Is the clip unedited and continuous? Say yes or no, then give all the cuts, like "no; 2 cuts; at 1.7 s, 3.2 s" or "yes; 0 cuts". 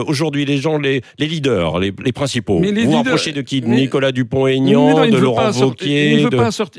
yes; 0 cuts